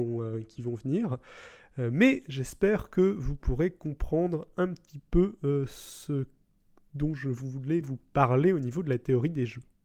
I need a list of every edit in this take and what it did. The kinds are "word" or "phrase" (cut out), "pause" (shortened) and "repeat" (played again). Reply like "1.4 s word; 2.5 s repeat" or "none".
none